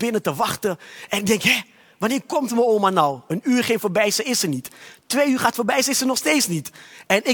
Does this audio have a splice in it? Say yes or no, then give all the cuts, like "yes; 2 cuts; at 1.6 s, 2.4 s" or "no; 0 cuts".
no; 0 cuts